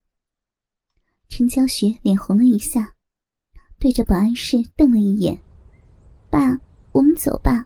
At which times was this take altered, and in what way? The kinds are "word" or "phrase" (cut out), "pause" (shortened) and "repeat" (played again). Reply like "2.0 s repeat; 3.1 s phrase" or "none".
none